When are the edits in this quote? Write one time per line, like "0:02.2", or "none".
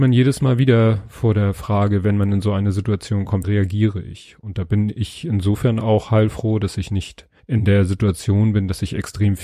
0:03.4
0:07.4